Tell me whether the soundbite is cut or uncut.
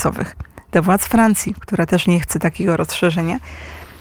uncut